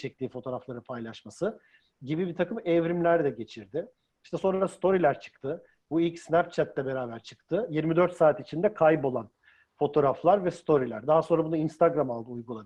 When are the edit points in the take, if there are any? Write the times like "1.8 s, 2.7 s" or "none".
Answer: none